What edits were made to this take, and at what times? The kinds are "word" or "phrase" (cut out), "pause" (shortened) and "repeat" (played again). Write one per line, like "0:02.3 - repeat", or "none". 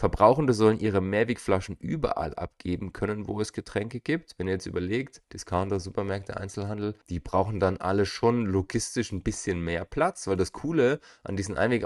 0:05.2 - pause
0:07.0 - pause